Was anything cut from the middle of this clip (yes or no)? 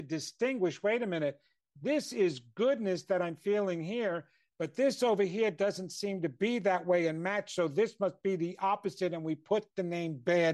no